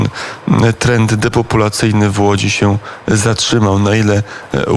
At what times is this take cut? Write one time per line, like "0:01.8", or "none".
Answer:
none